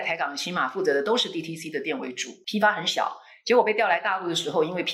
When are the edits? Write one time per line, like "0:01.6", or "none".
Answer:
none